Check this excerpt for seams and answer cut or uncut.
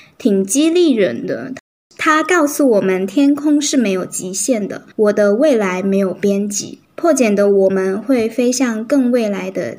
cut